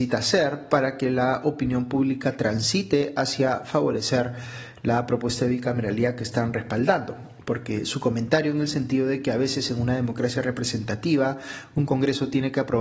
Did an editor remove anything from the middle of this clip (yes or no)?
no